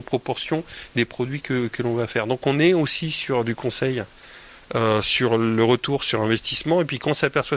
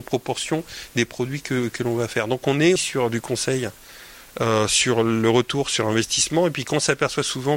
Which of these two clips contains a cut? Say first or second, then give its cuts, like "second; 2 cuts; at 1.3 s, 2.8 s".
second; 1 cut; at 2.8 s